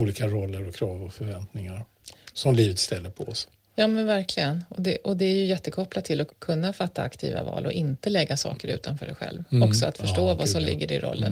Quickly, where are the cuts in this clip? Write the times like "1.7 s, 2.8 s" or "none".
2.3 s, 6.3 s